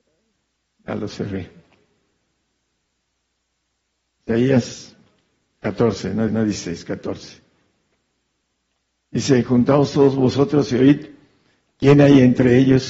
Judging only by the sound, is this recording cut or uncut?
cut